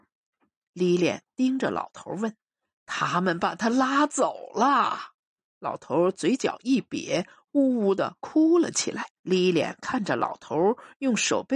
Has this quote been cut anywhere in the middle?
yes; 3 cuts; at 2.4 s, 5.2 s, 9.2 s

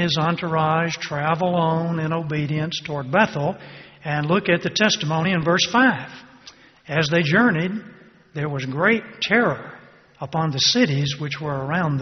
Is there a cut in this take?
no; 0 cuts

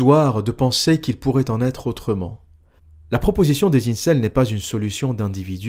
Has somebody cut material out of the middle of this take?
no; 0 cuts

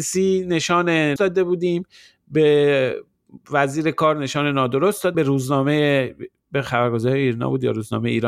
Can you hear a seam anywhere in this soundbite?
yes; 2 cuts; at 1.2 s, 5.1 s

